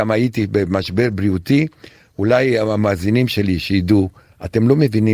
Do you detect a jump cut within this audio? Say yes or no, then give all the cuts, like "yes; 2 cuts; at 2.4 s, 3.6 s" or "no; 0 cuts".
no; 0 cuts